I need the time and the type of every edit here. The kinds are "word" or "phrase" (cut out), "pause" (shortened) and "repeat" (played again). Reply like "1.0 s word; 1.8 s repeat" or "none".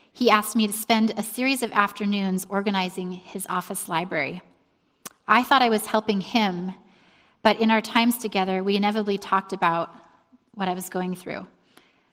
none